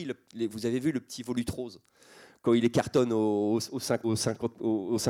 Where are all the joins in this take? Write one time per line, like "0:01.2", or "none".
0:04.0